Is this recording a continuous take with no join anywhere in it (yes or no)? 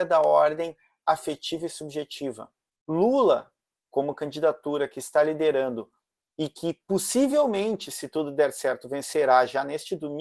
yes